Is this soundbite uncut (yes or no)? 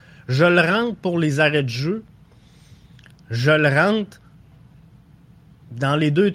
yes